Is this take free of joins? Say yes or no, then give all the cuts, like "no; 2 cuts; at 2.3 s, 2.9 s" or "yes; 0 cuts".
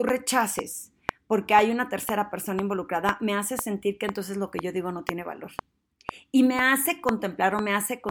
yes; 0 cuts